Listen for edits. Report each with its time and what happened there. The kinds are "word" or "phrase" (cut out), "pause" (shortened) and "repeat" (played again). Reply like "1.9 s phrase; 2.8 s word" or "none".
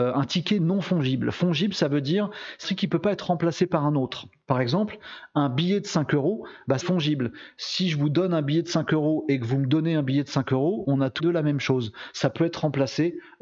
2.6 s word; 6.8 s word; 11.2 s word